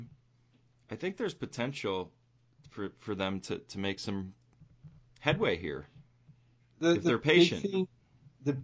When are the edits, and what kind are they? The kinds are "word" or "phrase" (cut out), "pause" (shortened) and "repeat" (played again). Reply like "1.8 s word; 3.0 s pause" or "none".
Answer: none